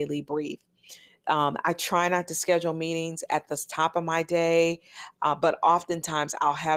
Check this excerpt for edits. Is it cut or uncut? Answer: uncut